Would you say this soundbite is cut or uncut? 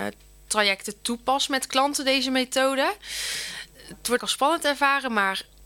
cut